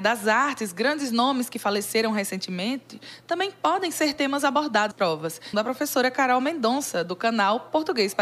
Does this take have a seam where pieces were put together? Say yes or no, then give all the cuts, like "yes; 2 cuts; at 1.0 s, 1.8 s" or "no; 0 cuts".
yes; 2 cuts; at 4.9 s, 5.5 s